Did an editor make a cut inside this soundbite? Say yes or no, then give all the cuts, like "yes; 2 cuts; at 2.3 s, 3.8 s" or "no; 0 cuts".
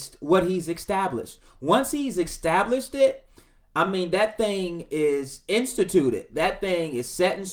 no; 0 cuts